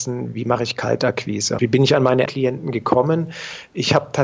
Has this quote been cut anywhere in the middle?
yes; 2 cuts; at 1.6 s, 2.3 s

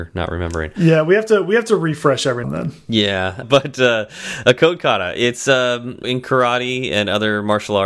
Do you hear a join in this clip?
yes; 3 cuts; at 2.4 s, 3.4 s, 6.0 s

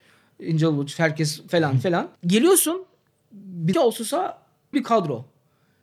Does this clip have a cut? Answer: yes; 4 cuts; at 1.5 s, 2.2 s, 3.7 s, 4.7 s

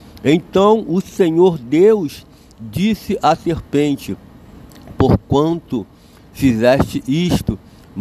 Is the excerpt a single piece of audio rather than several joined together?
yes; 0 cuts

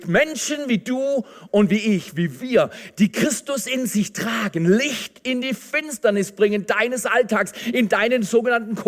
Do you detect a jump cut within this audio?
no; 0 cuts

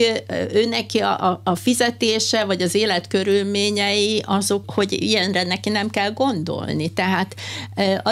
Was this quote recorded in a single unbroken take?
no; 1 cut; at 4.6 s

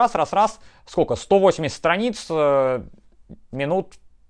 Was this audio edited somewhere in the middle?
no; 0 cuts

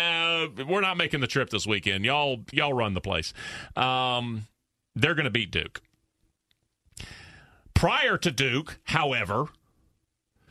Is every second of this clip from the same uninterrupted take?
no; 1 cut; at 2.5 s

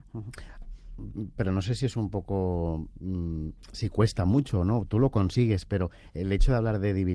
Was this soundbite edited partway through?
no; 0 cuts

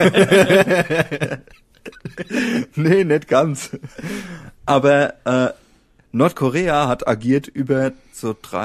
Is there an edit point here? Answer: no; 0 cuts

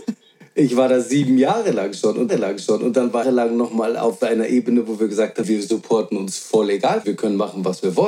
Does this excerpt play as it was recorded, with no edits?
no; 4 cuts; at 2.3 s, 3.2 s, 5.4 s, 7.0 s

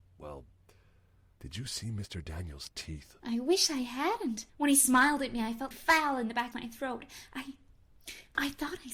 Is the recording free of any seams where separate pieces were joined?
no; 3 cuts; at 4.5 s, 5.7 s, 6.5 s

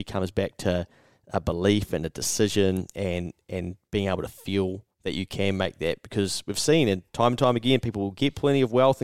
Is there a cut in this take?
no; 0 cuts

